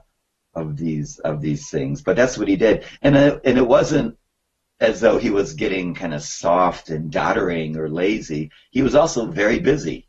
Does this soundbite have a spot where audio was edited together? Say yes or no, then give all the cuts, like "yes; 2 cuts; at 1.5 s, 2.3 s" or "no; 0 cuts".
no; 0 cuts